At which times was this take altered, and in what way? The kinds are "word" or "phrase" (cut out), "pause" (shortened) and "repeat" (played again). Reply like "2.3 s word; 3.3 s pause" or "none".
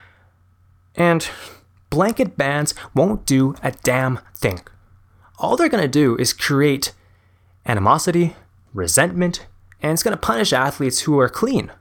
none